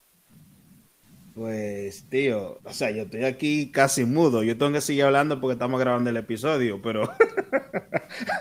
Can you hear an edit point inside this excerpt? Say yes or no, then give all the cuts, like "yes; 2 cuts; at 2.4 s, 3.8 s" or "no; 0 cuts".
yes; 1 cut; at 2.6 s